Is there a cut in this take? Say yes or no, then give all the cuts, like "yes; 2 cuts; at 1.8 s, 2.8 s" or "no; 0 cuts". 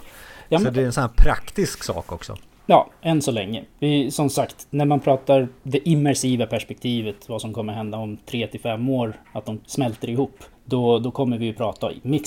yes; 3 cuts; at 5.6 s, 9.6 s, 10.5 s